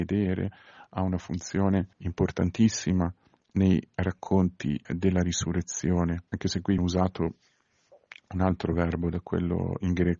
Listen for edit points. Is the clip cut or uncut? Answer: cut